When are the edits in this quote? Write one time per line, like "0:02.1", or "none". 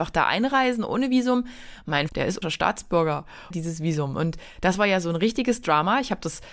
0:02.1
0:02.4
0:03.5